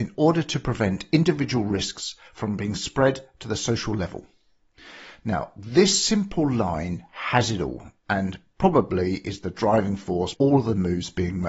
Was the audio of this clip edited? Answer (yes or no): yes